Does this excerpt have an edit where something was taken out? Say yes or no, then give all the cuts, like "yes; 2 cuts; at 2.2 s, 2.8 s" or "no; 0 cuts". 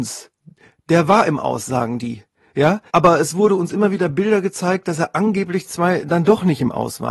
yes; 1 cut; at 2.9 s